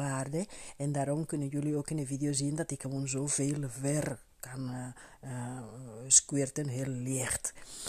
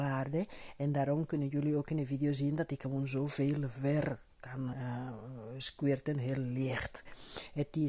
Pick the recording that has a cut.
second; 1 cut; at 4.7 s

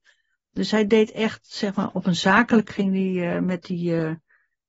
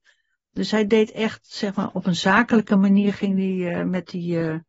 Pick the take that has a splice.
first; 1 cut; at 2.7 s

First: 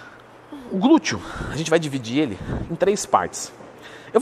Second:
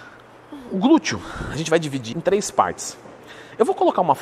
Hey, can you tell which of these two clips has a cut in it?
second; 1 cut; at 2.1 s

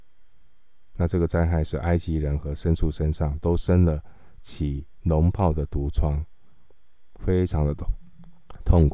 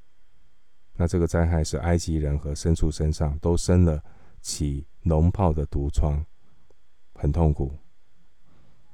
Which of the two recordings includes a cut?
first; 1 cut; at 7.2 s

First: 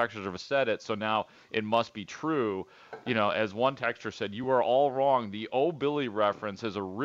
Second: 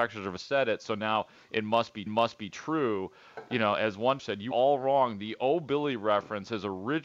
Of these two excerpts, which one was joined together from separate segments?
second; 3 cuts; at 2.1 s, 4.2 s, 4.5 s

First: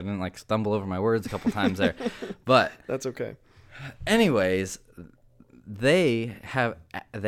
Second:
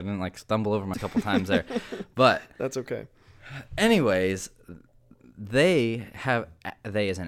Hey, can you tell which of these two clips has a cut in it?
second; 1 cut; at 0.9 s

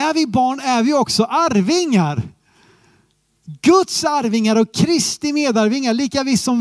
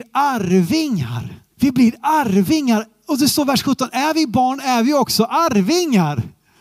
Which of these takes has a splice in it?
second; 1 cut; at 1.5 s

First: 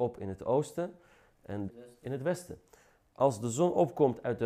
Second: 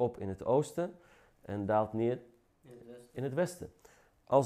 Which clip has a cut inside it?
first; 1 cut; at 1.7 s

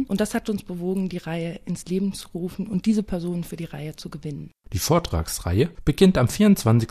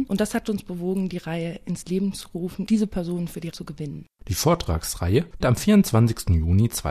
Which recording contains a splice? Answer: second; 3 cuts; at 2.7 s, 3.5 s, 5.4 s

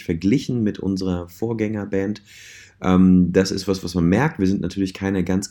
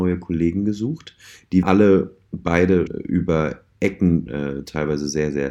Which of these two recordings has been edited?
second; 3 cuts; at 1.6 s, 2.9 s, 4.3 s

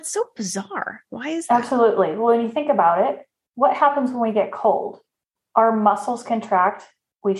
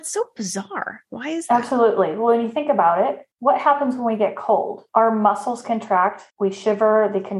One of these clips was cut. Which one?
second; 3 cuts; at 3.3 s, 4.9 s, 6.3 s

